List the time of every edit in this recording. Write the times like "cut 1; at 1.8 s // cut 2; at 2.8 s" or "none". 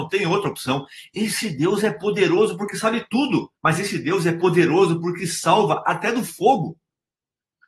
cut 1; at 3.6 s